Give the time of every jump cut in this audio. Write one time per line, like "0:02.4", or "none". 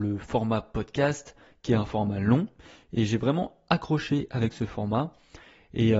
none